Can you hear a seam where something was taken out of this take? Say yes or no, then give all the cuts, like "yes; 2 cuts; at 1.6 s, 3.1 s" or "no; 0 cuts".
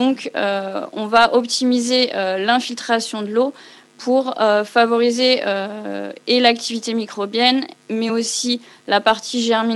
no; 0 cuts